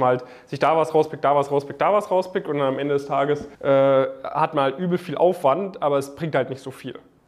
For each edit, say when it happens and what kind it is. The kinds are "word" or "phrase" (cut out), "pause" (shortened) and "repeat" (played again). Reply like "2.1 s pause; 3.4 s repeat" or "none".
3.5 s pause